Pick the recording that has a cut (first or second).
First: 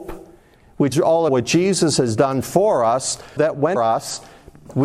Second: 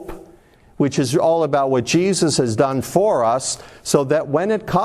first